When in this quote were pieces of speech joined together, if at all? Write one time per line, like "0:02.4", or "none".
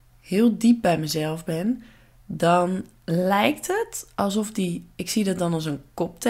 none